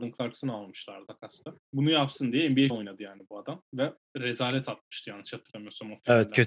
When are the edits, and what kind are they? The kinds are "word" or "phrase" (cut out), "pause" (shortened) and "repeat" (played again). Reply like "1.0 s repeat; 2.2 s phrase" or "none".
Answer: 1.0 s word; 1.6 s pause; 2.7 s word